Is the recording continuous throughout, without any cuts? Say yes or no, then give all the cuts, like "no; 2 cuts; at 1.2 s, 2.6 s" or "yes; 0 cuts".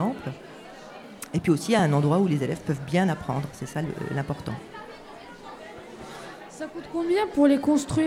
yes; 0 cuts